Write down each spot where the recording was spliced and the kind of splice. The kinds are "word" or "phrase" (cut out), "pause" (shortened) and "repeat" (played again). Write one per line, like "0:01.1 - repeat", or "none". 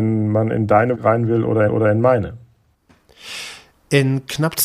0:00.9 - phrase
0:01.7 - repeat